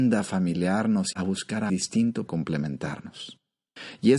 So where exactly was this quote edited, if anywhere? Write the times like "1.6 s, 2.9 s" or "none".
1.1 s, 1.7 s, 2.3 s